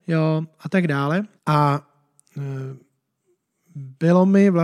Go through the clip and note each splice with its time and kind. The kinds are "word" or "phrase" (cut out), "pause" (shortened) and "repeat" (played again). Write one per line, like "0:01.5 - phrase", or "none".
0:01.4 - pause